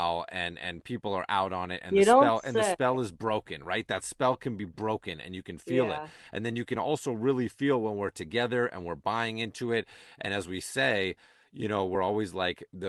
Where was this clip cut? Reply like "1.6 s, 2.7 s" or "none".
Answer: none

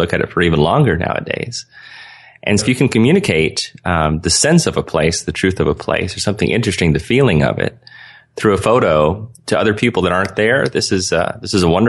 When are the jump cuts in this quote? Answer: 2.6 s

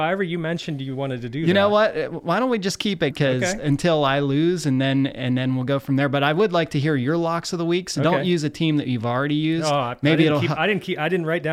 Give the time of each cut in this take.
3.1 s

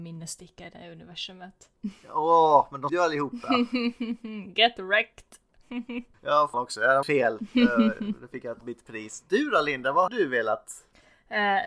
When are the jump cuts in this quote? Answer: 2.9 s, 6.5 s, 7.0 s, 8.6 s, 10.1 s

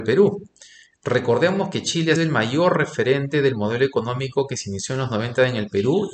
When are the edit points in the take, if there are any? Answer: 2.2 s

